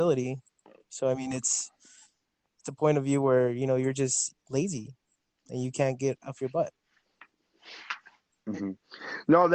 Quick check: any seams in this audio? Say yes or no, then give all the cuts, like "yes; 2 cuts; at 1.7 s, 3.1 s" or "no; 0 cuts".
no; 0 cuts